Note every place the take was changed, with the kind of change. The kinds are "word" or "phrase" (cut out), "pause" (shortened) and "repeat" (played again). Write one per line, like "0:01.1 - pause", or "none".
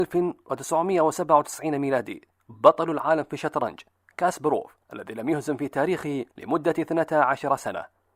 0:04.8 - pause
0:06.3 - pause